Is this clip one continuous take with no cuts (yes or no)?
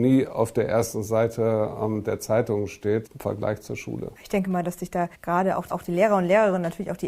no